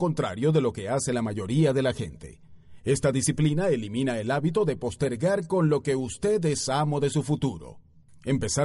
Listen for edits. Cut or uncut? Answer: uncut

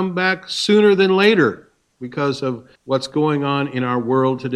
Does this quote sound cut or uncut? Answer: cut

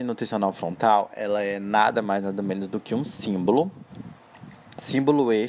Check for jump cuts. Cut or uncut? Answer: uncut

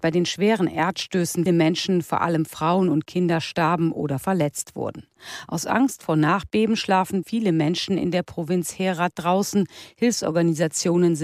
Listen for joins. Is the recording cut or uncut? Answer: cut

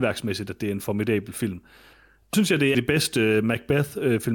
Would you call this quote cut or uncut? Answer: cut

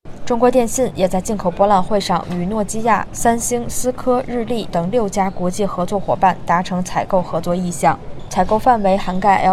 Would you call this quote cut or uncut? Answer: cut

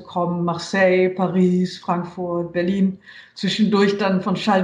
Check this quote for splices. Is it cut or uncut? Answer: uncut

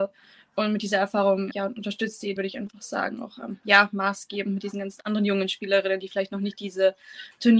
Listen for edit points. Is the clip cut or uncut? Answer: cut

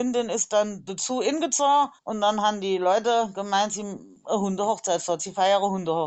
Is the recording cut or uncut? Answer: cut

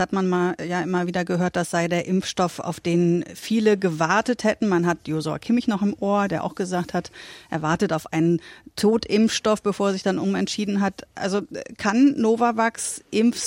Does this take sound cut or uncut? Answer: uncut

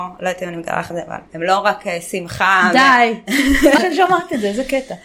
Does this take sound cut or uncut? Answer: cut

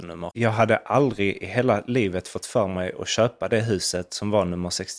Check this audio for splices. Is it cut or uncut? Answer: uncut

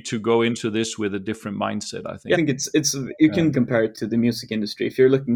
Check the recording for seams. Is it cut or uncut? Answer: cut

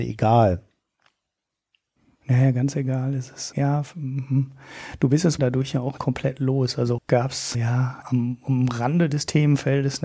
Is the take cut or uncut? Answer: cut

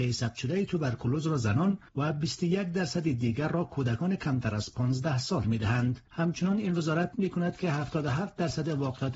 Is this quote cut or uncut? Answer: cut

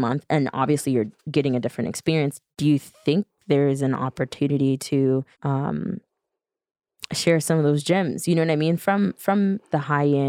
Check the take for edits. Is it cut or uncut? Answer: cut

